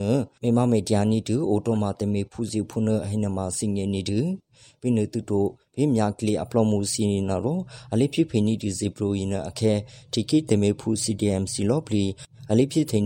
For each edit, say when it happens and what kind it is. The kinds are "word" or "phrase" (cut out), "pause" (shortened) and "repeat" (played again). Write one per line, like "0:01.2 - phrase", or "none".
none